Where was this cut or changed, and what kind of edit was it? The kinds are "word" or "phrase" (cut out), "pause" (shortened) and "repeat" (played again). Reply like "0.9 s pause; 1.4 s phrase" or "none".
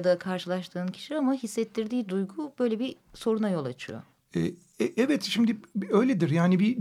4.1 s pause